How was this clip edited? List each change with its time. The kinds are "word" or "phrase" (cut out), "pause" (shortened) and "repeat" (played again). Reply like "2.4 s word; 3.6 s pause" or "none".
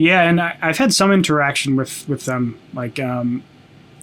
none